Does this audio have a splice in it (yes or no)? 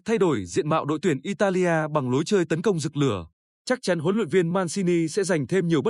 no